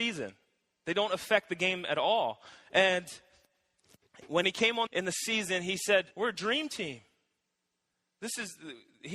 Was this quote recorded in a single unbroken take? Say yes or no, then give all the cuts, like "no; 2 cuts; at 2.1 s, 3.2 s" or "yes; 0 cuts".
no; 3 cuts; at 4.4 s, 4.9 s, 6.1 s